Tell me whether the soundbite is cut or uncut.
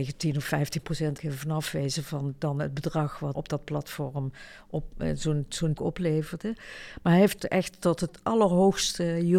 cut